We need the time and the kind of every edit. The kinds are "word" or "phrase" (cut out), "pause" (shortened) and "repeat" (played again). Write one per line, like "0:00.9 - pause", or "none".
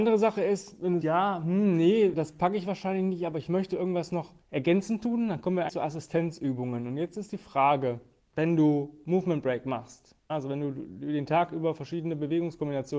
0:01.0 - word
0:02.1 - word
0:04.4 - pause
0:05.7 - word
0:08.2 - pause
0:10.3 - word